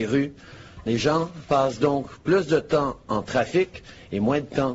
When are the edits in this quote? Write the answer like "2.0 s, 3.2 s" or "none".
none